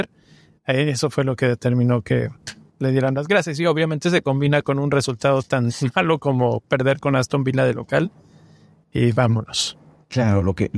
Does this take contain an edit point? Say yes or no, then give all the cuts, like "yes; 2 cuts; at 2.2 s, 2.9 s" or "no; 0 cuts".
no; 0 cuts